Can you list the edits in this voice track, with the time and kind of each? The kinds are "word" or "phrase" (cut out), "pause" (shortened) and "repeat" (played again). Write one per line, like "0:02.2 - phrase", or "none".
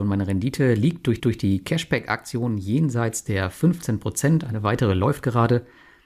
0:01.2 - repeat